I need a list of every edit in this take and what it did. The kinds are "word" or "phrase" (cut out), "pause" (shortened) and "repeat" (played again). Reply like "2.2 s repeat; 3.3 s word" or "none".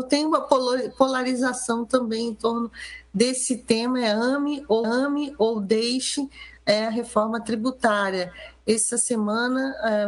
4.8 s repeat